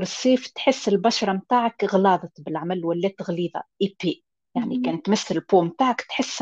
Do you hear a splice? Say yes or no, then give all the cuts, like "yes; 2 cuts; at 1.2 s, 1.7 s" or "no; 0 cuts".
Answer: yes; 1 cut; at 4.4 s